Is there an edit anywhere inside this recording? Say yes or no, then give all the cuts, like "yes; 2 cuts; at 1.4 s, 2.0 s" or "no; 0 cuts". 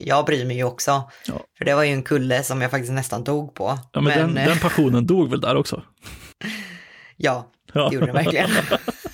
yes; 1 cut; at 6.3 s